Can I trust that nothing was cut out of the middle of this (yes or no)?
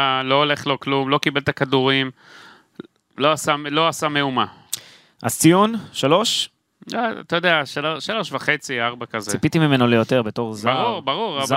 yes